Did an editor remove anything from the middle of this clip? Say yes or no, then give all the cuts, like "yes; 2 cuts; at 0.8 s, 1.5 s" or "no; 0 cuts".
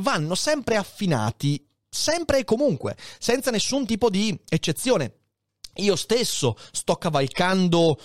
no; 0 cuts